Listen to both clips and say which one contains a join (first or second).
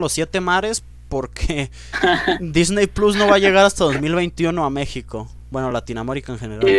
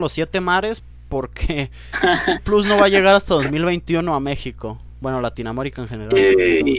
second